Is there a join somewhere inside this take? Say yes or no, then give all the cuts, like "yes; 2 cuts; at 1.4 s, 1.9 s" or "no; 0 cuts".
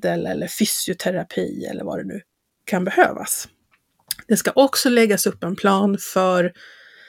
no; 0 cuts